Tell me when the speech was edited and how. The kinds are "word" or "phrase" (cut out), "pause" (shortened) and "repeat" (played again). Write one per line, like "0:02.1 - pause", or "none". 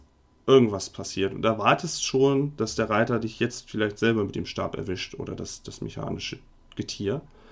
none